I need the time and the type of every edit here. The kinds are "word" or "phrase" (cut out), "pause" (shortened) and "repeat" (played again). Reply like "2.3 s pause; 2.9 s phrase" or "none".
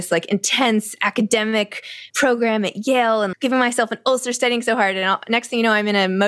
2.1 s pause; 3.3 s word